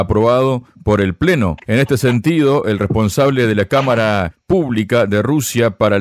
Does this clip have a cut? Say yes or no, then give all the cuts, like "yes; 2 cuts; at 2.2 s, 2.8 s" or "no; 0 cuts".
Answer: no; 0 cuts